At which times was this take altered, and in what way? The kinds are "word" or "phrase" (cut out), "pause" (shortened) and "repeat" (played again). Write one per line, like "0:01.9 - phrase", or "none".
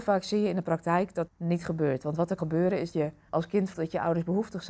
0:01.3 - word
0:02.4 - word
0:02.9 - word
0:03.3 - word
0:03.7 - word